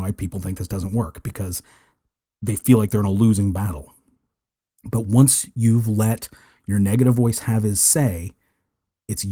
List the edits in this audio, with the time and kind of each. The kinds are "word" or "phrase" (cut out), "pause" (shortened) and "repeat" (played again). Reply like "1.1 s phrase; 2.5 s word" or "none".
none